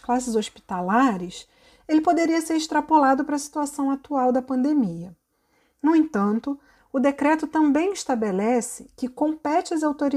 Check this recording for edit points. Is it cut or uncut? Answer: uncut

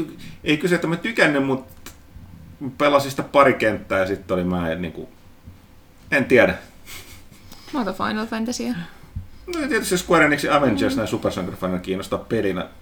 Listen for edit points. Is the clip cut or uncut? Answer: cut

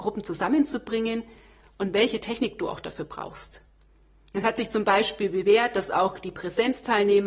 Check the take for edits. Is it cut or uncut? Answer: uncut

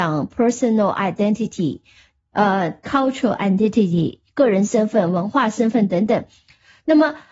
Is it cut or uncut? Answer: uncut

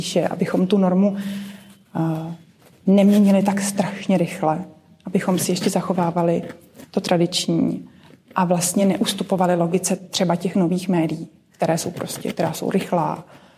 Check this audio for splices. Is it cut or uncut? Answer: uncut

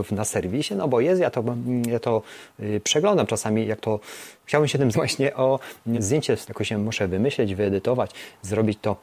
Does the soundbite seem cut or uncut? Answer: cut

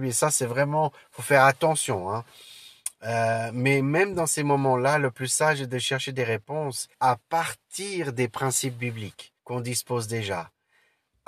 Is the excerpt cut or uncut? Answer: cut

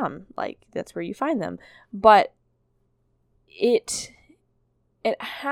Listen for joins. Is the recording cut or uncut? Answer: uncut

